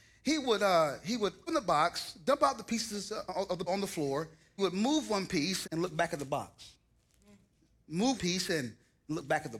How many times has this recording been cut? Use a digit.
5